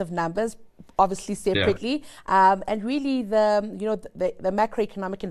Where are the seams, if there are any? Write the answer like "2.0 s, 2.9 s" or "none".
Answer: none